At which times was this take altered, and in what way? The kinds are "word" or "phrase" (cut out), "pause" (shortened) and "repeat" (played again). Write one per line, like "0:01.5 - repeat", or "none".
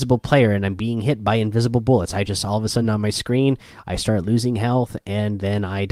none